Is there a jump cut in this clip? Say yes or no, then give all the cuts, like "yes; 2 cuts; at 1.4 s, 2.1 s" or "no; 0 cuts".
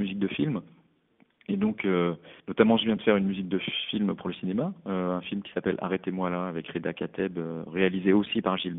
no; 0 cuts